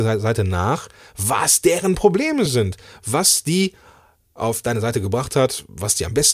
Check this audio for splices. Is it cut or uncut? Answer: uncut